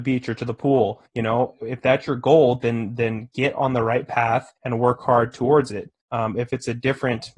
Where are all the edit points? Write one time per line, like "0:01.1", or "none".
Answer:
0:01.1
0:04.6
0:06.0